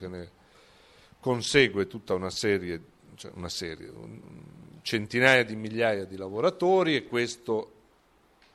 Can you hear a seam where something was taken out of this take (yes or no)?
no